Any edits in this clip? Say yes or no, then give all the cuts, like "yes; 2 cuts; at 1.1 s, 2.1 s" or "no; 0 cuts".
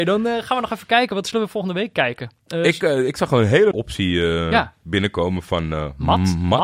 yes; 1 cut; at 3.7 s